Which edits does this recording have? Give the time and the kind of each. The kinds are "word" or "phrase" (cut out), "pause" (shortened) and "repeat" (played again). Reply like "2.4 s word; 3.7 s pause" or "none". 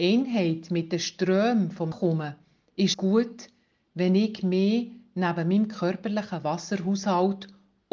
1.9 s word; 2.9 s word

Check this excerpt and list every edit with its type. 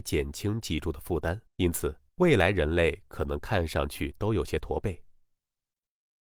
1.5 s pause; 2.1 s pause

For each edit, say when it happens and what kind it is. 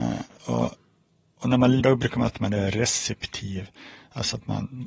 1.8 s word; 2.3 s word

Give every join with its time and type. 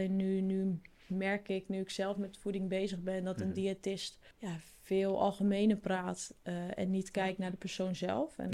4.3 s pause

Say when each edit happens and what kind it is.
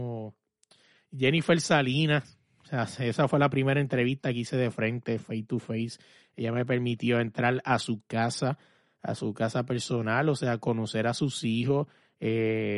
none

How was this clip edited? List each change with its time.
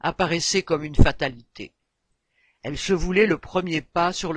none

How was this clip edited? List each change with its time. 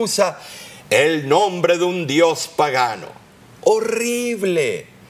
none

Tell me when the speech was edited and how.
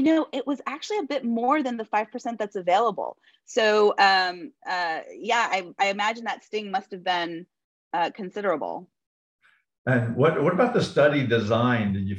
none

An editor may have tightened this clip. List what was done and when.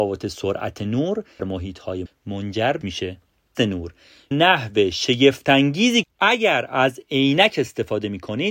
1.4 s word; 2.1 s word; 2.8 s word; 3.5 s word; 4.3 s word; 6.0 s word

